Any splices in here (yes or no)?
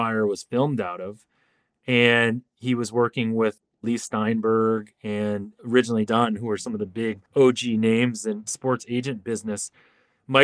yes